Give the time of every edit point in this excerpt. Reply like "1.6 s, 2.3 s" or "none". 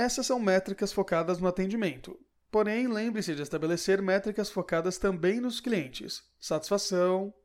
none